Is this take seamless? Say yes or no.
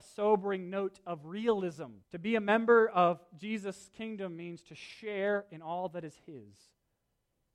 no